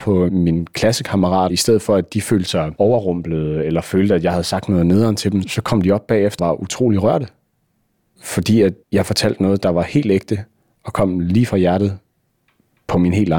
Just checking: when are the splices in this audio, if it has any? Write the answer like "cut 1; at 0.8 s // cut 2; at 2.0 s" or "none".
cut 1; at 1.5 s // cut 2; at 6.4 s